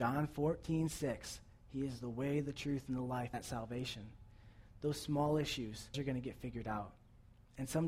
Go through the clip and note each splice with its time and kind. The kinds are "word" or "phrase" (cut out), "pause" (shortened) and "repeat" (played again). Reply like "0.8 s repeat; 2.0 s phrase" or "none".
3.3 s phrase; 5.9 s word